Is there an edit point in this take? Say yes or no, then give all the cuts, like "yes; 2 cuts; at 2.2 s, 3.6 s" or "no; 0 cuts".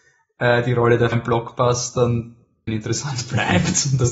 yes; 2 cuts; at 1.1 s, 2.7 s